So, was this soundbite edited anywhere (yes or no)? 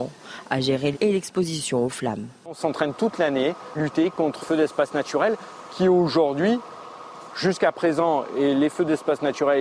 yes